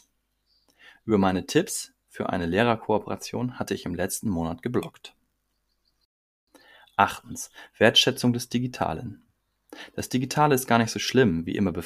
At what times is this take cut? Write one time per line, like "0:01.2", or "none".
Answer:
none